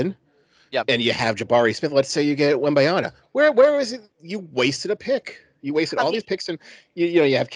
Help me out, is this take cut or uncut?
cut